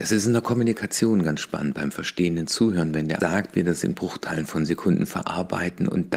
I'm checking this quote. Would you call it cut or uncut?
cut